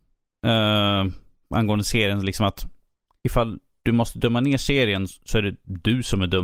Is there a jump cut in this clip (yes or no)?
no